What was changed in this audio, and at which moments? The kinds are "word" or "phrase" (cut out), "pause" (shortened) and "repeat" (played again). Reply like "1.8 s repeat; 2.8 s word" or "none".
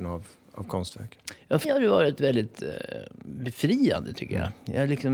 1.6 s word